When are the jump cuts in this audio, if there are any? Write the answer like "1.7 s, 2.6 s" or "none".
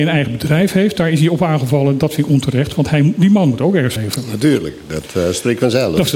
4.0 s